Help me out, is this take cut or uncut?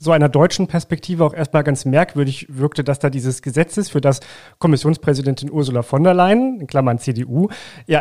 uncut